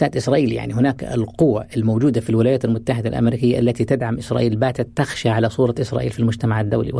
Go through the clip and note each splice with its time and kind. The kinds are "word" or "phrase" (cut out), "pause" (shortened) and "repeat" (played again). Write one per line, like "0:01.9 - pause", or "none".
none